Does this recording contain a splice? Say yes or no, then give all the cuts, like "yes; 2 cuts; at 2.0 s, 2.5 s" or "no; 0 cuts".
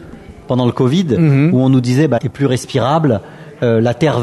yes; 1 cut; at 2.2 s